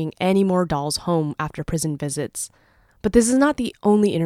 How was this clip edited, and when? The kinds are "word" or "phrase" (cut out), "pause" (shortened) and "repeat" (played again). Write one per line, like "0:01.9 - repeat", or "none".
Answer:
none